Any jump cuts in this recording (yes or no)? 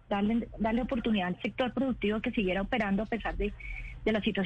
no